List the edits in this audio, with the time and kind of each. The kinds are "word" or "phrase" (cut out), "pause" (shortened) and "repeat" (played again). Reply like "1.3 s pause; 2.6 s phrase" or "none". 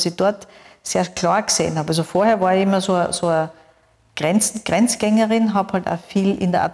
none